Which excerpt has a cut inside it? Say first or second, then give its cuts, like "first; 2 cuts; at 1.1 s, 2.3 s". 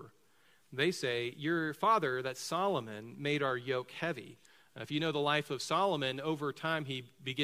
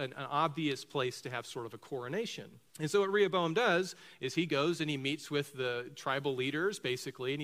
second; 1 cut; at 2.7 s